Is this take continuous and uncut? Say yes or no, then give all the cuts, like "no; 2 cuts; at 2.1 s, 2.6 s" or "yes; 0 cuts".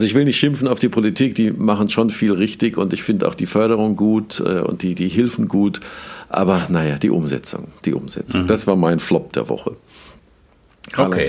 yes; 0 cuts